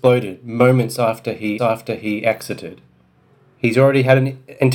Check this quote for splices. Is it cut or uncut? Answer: cut